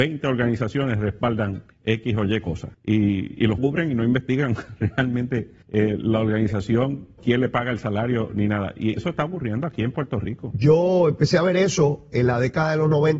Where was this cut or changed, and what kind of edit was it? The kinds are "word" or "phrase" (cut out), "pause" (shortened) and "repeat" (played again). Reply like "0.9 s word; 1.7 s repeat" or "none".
1.7 s pause; 2.7 s pause; 3.6 s phrase; 5.6 s pause; 7.2 s word; 9.0 s word